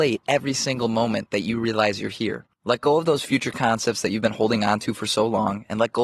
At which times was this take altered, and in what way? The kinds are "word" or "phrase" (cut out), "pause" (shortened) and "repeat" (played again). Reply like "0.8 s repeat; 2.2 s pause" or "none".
2.5 s pause